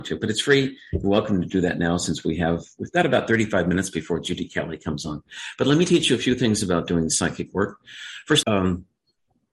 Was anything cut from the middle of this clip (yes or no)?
yes